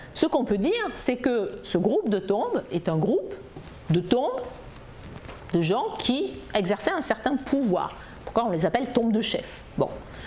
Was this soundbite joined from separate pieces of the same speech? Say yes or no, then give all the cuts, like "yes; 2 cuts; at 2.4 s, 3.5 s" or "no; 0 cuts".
no; 0 cuts